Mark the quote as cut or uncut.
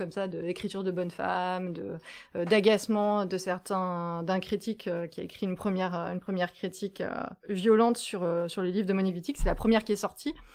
cut